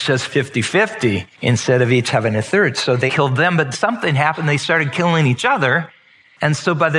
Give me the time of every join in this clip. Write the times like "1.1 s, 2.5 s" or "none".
1.3 s, 3.1 s, 3.7 s